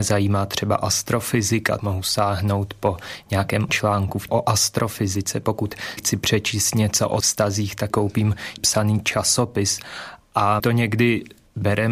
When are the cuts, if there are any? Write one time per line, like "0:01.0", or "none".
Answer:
0:01.8
0:03.7
0:04.3
0:06.0
0:07.2
0:07.9
0:08.6
0:10.6